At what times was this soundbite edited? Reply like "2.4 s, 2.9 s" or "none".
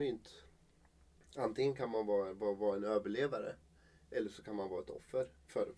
none